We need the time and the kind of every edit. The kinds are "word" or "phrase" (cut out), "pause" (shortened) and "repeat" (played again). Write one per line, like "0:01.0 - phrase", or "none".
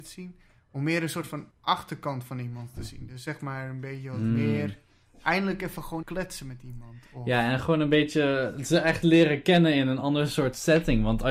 0:01.5 - pause
0:06.0 - word

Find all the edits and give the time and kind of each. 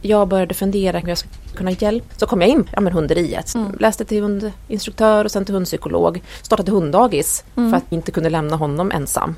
0:01.0 - word
0:01.5 - word
0:02.1 - word
0:02.7 - word
0:03.5 - word
0:07.9 - word

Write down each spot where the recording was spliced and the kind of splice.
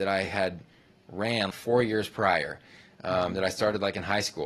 0:01.5 - word

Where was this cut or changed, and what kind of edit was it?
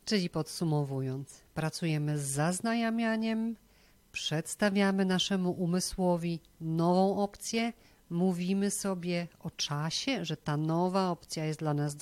none

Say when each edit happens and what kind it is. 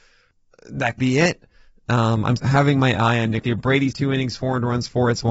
0:01.0 - word
0:02.4 - word
0:03.4 - word
0:03.9 - word

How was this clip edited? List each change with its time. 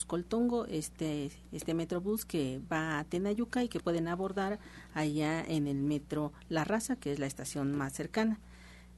0:03.8 - word

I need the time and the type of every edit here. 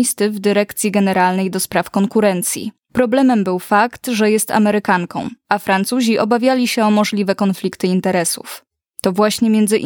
none

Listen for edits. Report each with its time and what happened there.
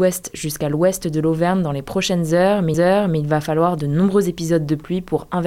0:02.7 - repeat

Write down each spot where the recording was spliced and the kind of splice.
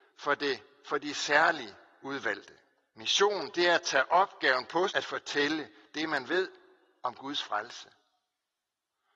0:04.9 - word

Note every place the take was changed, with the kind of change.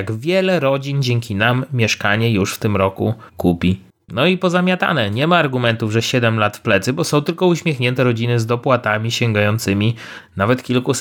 0:03.3 - pause

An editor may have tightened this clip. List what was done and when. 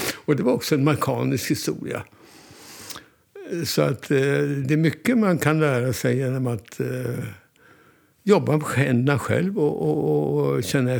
none

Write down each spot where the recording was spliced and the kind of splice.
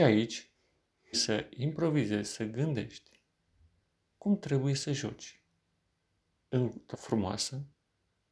0:01.1 - word
0:06.9 - word

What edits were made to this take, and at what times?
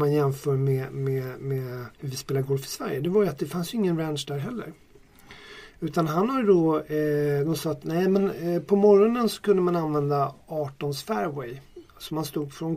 0:01.9 - pause

